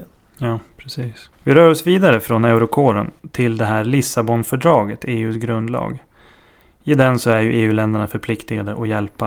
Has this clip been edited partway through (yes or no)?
no